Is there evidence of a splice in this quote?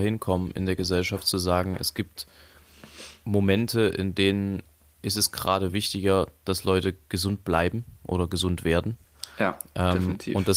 no; 0 cuts

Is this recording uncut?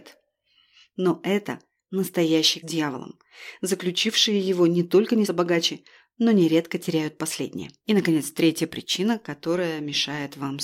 no; 3 cuts; at 2.6 s, 5.3 s, 7.8 s

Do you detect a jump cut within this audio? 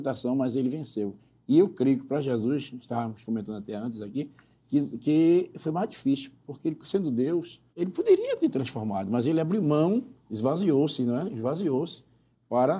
yes; 1 cut; at 7.7 s

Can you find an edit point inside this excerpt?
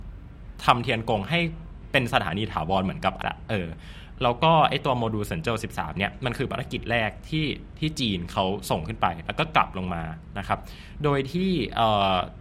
yes; 1 cut; at 3.2 s

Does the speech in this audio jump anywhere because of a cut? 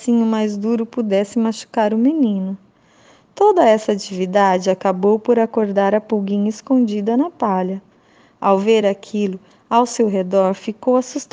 no; 0 cuts

